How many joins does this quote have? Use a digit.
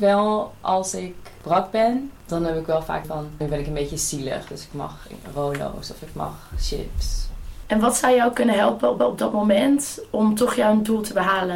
3